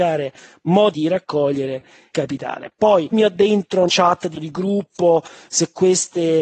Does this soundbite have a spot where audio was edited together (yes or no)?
yes